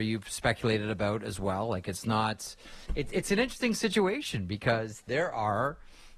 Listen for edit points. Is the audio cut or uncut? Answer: uncut